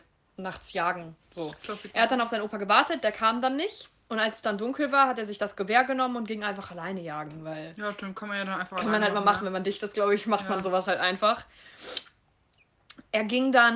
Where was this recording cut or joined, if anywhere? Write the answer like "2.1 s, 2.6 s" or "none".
1.2 s